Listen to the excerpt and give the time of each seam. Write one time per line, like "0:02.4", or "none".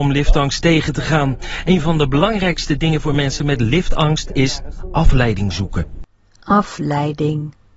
none